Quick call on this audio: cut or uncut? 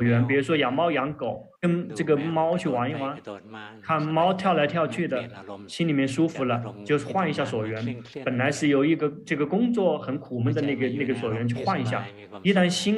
cut